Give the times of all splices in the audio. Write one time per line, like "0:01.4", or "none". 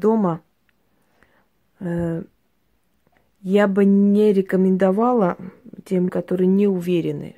0:06.1